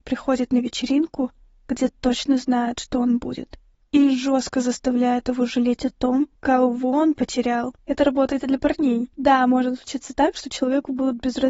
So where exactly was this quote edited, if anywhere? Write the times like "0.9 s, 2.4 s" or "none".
3.7 s, 6.4 s, 7.8 s, 9.1 s